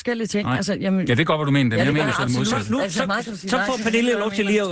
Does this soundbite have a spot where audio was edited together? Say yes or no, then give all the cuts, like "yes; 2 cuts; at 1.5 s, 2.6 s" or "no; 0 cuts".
no; 0 cuts